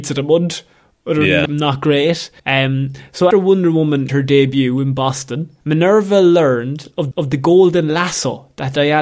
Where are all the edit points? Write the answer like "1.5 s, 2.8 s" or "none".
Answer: 1.5 s, 2.4 s, 3.3 s, 4.1 s, 5.6 s, 7.1 s